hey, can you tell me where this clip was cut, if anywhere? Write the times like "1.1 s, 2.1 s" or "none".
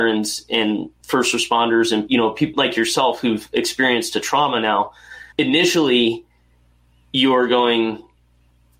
2.1 s, 2.5 s, 5.3 s

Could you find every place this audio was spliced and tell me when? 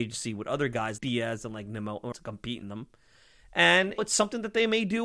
1.0 s, 2.1 s, 2.6 s, 4.0 s

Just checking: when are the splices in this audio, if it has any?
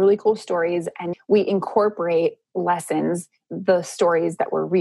1.1 s, 3.5 s

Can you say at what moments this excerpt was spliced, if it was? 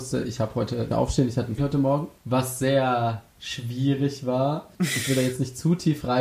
0.9 s, 1.6 s, 2.2 s, 3.3 s, 4.7 s

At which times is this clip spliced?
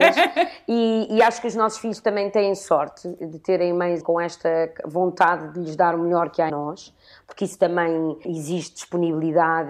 4.0 s, 6.5 s, 8.2 s

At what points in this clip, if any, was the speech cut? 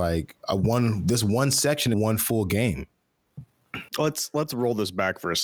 1.9 s, 3.9 s

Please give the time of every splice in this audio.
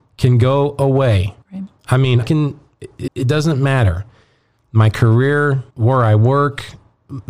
1.4 s, 2.2 s, 3.1 s, 5.7 s

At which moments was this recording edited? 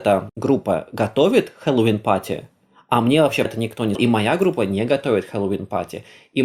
3.4 s, 3.9 s

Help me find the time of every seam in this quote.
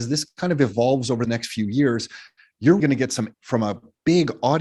1.2 s, 2.8 s, 3.3 s

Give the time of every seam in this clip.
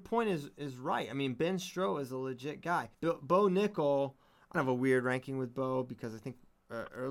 2.9 s, 4.5 s

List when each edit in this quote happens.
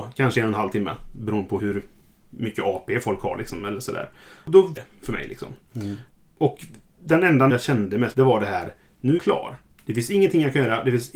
1.6 s, 4.8 s, 7.5 s, 8.1 s, 9.2 s

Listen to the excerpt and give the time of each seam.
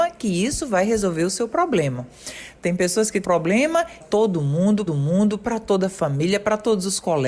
3.2 s, 4.0 s, 4.9 s

